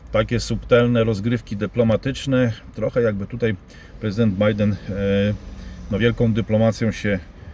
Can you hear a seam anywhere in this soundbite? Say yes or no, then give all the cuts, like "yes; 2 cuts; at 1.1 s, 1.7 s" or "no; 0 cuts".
no; 0 cuts